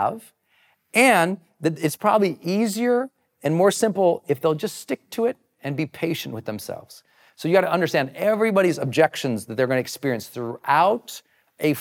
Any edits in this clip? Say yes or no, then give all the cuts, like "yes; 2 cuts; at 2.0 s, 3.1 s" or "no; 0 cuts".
no; 0 cuts